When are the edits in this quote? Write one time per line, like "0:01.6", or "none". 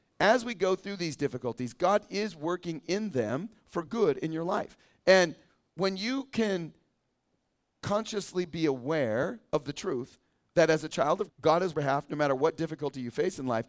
0:11.3
0:11.7

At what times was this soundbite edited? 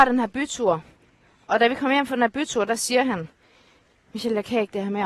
none

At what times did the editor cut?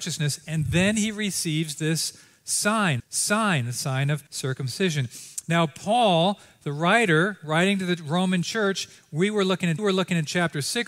0:03.0
0:04.3
0:09.8

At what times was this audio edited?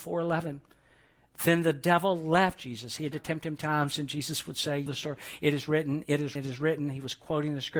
0:03.1
0:03.6
0:04.9
0:06.3

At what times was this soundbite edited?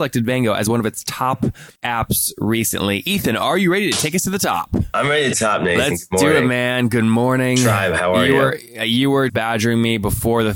0:01.8
0:05.3
0:09.3

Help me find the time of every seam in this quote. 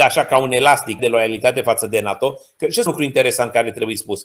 0:01.0
0:02.9

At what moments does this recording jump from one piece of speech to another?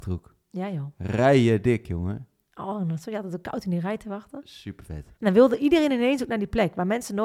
0:05.2

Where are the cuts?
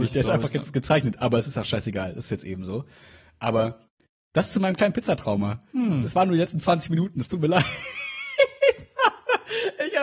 none

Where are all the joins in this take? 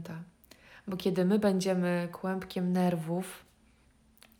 none

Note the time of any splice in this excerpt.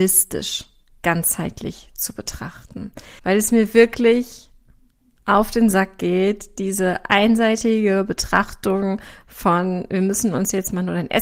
0:03.2

